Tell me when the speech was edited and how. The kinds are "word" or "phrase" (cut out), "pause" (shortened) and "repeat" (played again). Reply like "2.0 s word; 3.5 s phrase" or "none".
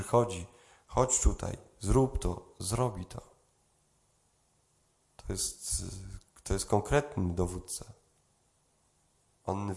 none